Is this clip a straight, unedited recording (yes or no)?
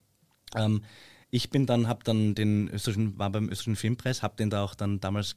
yes